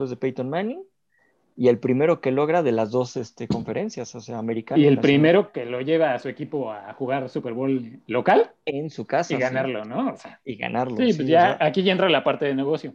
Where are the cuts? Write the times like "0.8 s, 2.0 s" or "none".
none